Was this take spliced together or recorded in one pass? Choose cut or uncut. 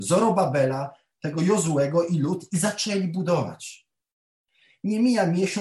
uncut